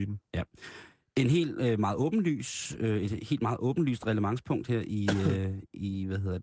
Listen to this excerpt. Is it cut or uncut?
uncut